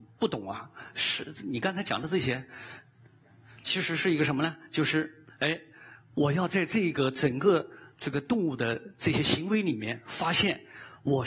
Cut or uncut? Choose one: cut